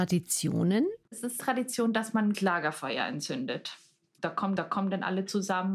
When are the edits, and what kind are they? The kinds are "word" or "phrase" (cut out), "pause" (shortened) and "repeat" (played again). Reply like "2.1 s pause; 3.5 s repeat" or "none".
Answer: 1.0 s pause; 1.4 s word; 2.3 s word; 4.6 s repeat